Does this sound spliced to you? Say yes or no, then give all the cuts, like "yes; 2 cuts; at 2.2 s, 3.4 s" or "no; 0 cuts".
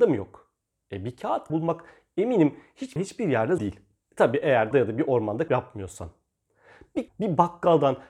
yes; 6 cuts; at 1.5 s, 3.0 s, 3.6 s, 4.7 s, 5.5 s, 7.1 s